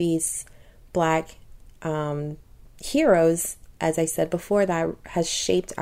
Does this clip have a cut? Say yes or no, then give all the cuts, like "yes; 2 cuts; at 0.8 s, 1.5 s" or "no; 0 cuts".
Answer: no; 0 cuts